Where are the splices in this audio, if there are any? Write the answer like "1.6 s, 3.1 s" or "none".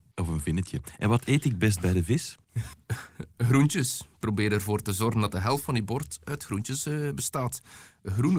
none